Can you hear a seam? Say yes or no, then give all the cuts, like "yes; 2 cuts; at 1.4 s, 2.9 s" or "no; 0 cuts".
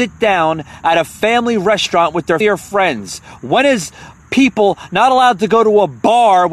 yes; 1 cut; at 2.4 s